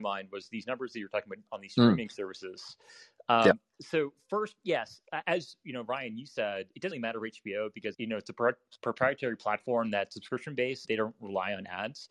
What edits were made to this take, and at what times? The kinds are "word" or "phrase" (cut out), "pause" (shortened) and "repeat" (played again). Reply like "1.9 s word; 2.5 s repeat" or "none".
1.5 s word; 6.9 s word; 7.9 s word; 10.8 s word